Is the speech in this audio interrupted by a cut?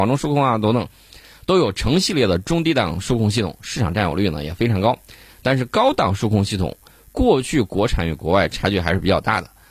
no; 0 cuts

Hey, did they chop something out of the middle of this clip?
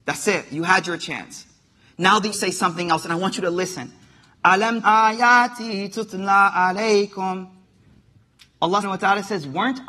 yes; 3 cuts; at 2.3 s, 4.8 s, 8.8 s

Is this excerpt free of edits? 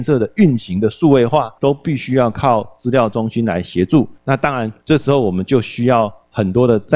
no; 3 cuts; at 1.6 s, 4.2 s, 4.8 s

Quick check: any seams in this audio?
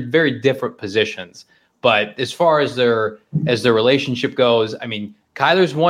no; 0 cuts

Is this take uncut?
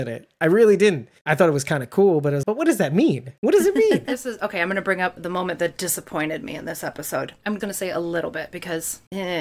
no; 4 cuts; at 1.2 s, 2.4 s, 5.2 s, 7.6 s

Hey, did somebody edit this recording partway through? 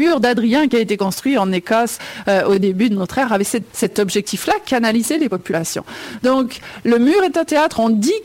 yes; 1 cut; at 3.7 s

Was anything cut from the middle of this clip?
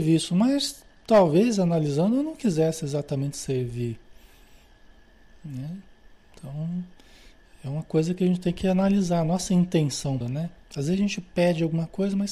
yes; 1 cut; at 10.2 s

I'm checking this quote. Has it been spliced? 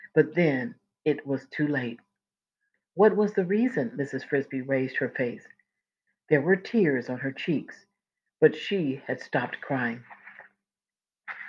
no; 0 cuts

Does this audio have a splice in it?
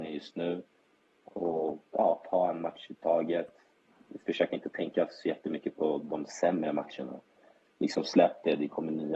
yes; 1 cut; at 1.9 s

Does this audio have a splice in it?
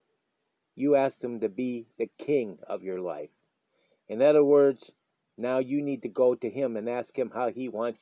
no; 0 cuts

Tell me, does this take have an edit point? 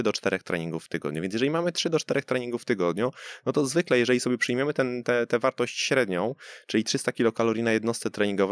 no; 0 cuts

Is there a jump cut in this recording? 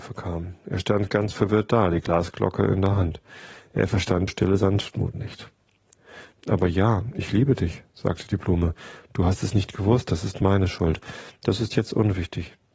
yes; 1 cut; at 4.3 s

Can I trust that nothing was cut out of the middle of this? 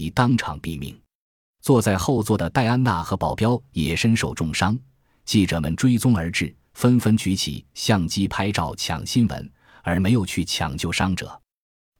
yes; 0 cuts

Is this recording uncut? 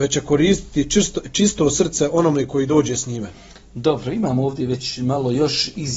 yes; 0 cuts

